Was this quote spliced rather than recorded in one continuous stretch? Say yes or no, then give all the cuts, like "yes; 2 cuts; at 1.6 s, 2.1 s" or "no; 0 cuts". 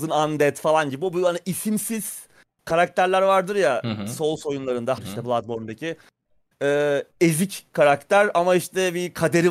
yes; 1 cut; at 5.0 s